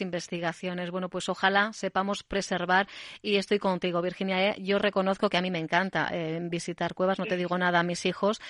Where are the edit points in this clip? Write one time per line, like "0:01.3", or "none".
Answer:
none

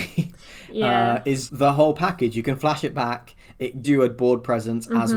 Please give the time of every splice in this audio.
0:01.5
0:03.8

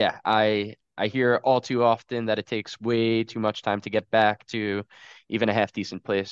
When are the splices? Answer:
none

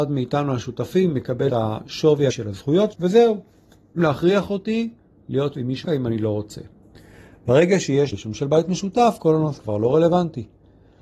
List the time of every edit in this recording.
0:01.5
0:02.3
0:02.9
0:04.0
0:05.5
0:05.8
0:08.1
0:09.6

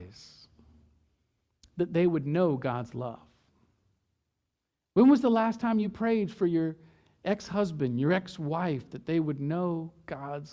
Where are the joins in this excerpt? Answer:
none

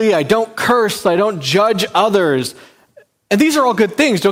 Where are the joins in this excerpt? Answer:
none

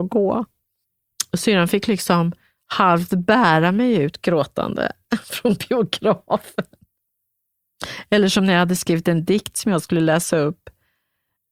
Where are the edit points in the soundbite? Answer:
none

